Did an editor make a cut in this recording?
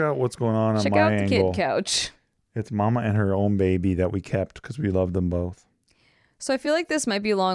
no; 0 cuts

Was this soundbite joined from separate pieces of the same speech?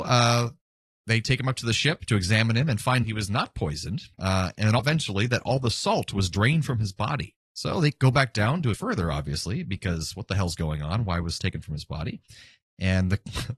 yes; 6 cuts; at 3.0 s, 4.1 s, 4.8 s, 7.4 s, 8.7 s, 11.4 s

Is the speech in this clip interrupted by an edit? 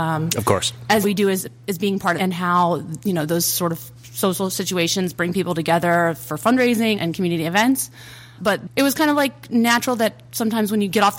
yes; 5 cuts; at 1.0 s, 2.2 s, 3.9 s, 6.9 s, 8.4 s

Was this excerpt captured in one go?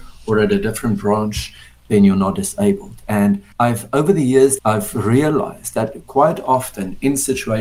no; 2 cuts; at 3.5 s, 4.6 s

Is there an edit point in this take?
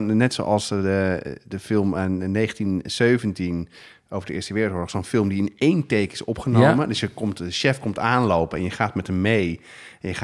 no; 0 cuts

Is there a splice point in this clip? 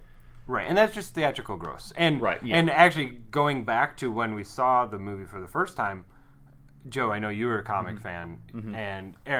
no; 0 cuts

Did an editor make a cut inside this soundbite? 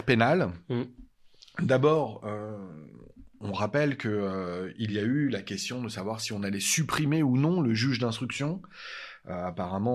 no; 0 cuts

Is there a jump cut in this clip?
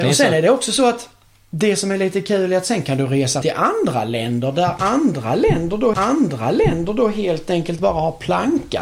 yes; 2 cuts; at 3.4 s, 5.9 s

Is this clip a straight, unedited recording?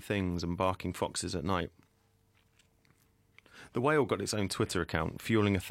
yes; 0 cuts

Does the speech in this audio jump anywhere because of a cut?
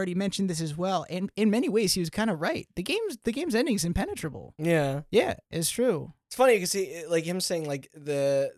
no; 0 cuts

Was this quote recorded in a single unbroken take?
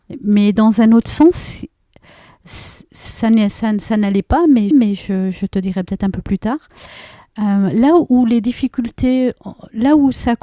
no; 1 cut; at 4.7 s

